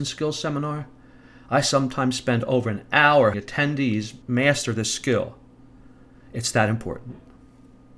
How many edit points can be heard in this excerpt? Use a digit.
2